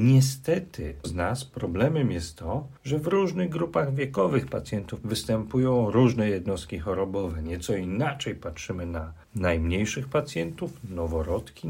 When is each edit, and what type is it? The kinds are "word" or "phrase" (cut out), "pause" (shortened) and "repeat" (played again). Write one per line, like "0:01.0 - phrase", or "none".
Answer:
0:01.0 - phrase
0:02.8 - pause
0:05.0 - word
0:09.2 - pause